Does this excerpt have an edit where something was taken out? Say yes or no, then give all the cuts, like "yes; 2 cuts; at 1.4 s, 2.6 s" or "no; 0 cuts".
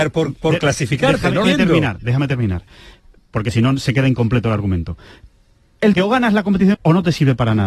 yes; 3 cuts; at 1.4 s, 5.9 s, 6.7 s